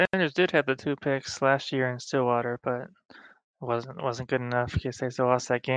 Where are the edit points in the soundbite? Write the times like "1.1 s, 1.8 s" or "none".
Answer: none